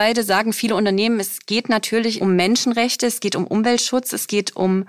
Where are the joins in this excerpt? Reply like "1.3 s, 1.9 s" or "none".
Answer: none

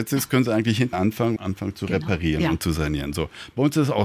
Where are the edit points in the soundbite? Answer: 0.9 s, 1.4 s

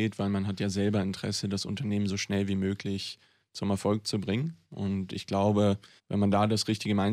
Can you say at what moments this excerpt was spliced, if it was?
6.0 s

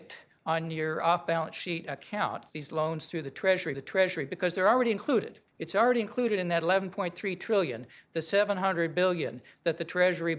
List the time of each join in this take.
2.5 s, 3.7 s, 5.5 s

